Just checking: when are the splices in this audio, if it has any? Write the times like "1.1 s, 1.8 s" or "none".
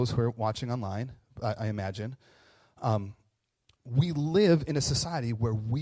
none